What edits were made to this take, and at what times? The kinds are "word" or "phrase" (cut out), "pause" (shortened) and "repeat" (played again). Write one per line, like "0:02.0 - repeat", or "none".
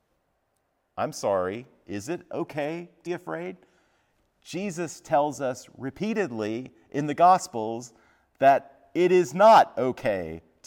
0:03.1 - word